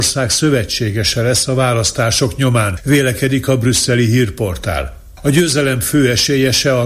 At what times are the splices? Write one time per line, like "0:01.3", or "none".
none